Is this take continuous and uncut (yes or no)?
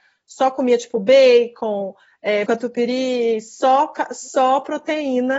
no